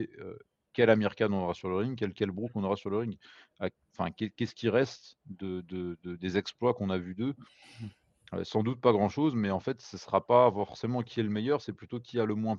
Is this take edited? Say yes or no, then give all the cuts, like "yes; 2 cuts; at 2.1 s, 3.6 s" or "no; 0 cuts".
no; 0 cuts